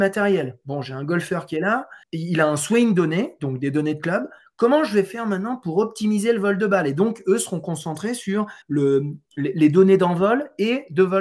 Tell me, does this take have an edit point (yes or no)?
yes